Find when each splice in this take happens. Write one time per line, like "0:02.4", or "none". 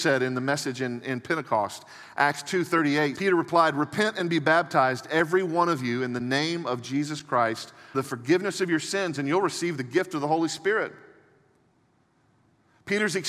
0:03.1
0:07.9